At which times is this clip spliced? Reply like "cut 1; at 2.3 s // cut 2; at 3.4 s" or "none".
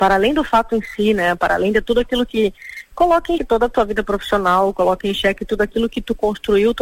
cut 1; at 3.4 s